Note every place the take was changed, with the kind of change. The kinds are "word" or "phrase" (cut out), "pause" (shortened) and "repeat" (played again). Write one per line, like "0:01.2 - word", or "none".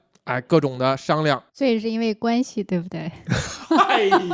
0:01.5 - pause